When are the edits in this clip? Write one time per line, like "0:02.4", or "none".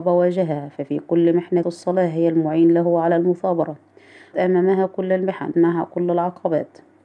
0:01.6
0:04.3
0:05.5